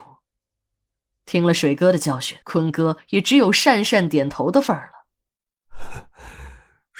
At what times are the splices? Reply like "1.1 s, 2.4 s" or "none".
2.4 s